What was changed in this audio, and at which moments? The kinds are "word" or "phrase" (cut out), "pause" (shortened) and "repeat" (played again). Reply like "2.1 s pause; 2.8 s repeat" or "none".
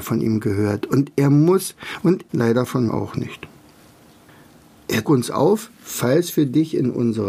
2.3 s word; 2.9 s word; 5.0 s word